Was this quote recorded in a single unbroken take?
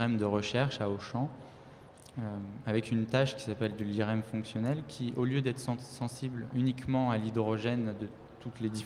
yes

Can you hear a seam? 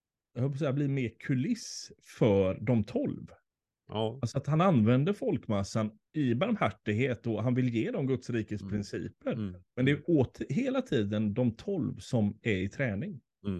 yes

